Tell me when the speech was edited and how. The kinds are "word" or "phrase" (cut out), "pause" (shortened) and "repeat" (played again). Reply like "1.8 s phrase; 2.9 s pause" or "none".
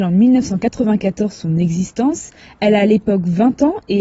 none